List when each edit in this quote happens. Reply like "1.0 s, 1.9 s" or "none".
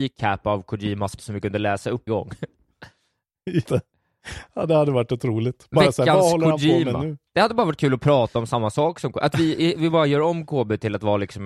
1.2 s, 2.1 s, 3.7 s, 7.3 s